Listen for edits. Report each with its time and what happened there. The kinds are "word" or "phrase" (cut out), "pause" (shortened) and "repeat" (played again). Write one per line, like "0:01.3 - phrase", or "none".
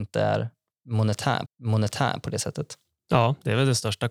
0:01.5 - repeat